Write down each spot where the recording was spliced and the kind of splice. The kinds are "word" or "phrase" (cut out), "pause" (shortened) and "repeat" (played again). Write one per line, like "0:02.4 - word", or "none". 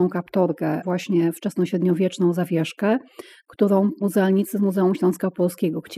none